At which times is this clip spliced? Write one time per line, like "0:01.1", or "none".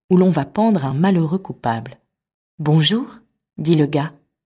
none